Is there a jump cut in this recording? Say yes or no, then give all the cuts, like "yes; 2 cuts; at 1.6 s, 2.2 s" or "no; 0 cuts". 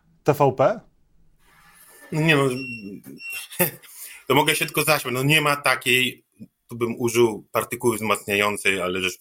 no; 0 cuts